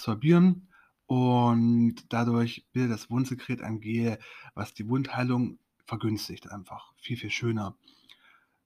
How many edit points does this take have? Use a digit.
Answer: 1